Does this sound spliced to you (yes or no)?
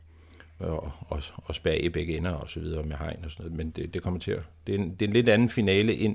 no